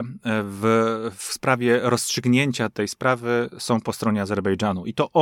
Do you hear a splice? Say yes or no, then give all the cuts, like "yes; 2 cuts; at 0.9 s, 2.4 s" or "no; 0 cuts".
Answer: no; 0 cuts